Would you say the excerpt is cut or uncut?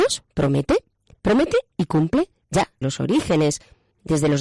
cut